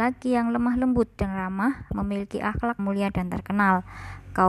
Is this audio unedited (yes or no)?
no